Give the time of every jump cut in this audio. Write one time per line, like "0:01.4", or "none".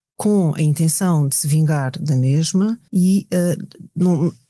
0:02.9

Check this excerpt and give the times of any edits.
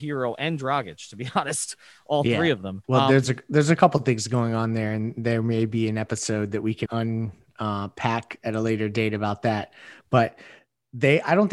0:02.8
0:06.9

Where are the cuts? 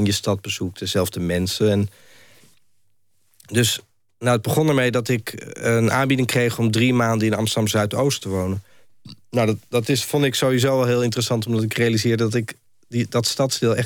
none

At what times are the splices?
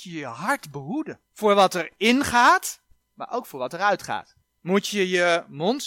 0:01.3
0:03.0
0:04.4

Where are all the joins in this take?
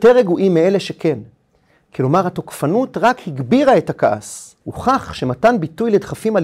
0:04.6

